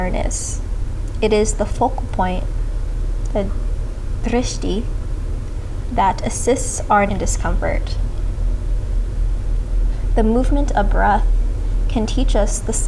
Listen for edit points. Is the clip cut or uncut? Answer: cut